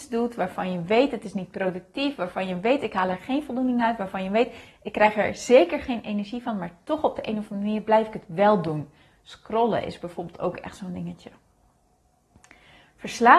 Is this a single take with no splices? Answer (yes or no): yes